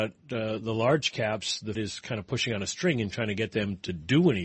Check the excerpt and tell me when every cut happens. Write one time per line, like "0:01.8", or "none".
0:01.7